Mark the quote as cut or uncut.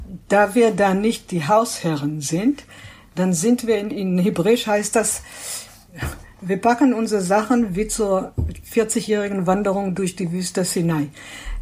uncut